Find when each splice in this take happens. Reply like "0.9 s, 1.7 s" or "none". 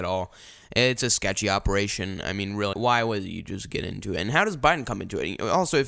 2.7 s